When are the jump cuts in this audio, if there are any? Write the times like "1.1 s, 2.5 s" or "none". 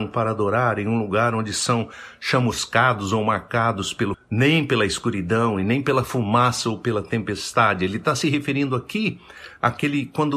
4.1 s